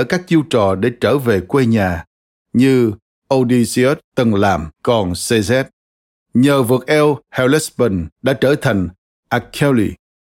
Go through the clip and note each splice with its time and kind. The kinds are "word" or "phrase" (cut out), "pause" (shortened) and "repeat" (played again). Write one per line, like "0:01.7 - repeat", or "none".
0:04.7 - pause
0:08.1 - pause